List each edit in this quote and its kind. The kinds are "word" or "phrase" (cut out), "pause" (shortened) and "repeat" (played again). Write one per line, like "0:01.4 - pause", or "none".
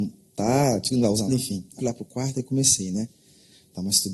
0:00.9 - word
0:01.3 - word
0:01.8 - word